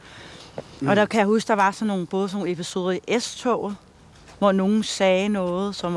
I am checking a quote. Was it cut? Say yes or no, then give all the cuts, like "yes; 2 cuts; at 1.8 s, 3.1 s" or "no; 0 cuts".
yes; 1 cut; at 4.4 s